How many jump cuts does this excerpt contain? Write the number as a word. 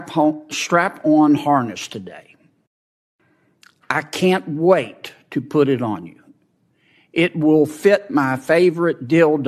zero